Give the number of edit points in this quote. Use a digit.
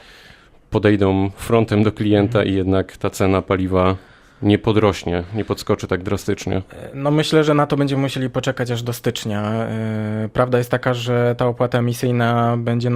0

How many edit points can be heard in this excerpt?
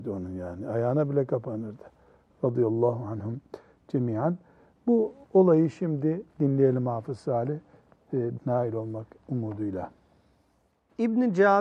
2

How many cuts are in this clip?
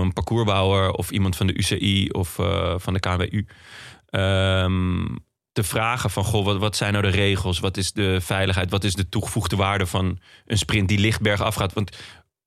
0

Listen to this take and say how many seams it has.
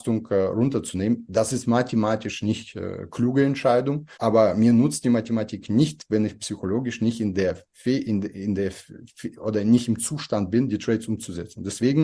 2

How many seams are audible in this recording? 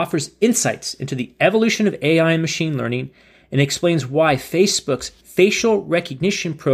0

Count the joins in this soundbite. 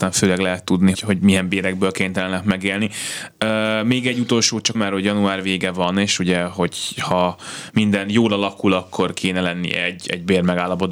2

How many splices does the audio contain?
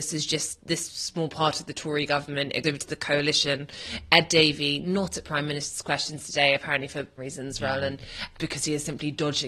2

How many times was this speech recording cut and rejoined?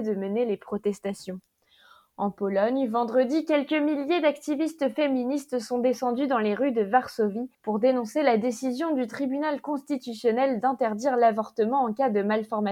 1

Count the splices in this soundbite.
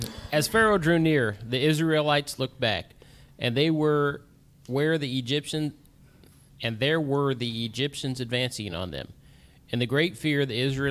0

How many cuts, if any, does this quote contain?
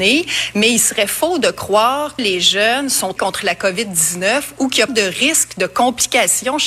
3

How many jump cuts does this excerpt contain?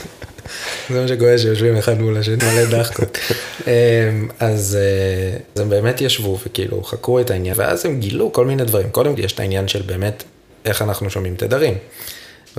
4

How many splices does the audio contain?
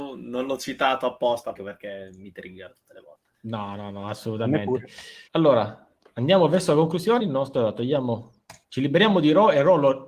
5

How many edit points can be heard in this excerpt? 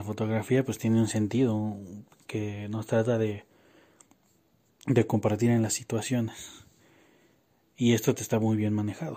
1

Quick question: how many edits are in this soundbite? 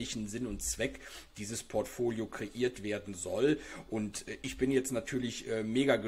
0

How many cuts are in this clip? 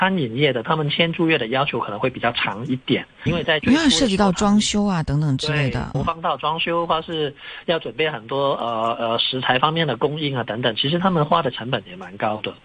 2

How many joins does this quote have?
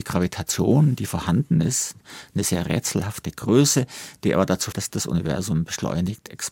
1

